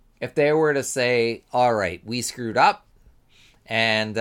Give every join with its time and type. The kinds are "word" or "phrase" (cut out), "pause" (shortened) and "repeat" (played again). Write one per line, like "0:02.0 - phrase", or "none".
none